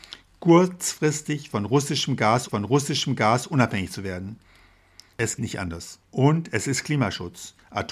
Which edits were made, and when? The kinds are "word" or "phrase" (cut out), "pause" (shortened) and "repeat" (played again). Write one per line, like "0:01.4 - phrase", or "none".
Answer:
0:02.5 - repeat
0:05.4 - word
0:06.0 - pause